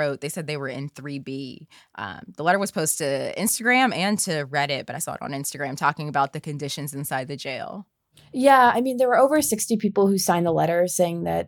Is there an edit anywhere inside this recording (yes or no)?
no